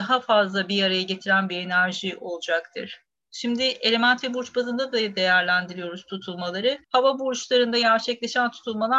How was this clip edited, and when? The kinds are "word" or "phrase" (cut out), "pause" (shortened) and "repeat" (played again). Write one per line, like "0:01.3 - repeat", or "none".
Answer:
0:06.8 - pause